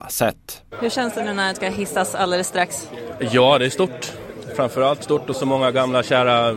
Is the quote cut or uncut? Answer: cut